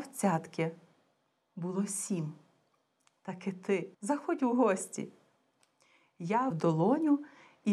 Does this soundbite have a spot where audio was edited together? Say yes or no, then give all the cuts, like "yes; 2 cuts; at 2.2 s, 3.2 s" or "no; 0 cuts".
yes; 2 cuts; at 3.9 s, 6.5 s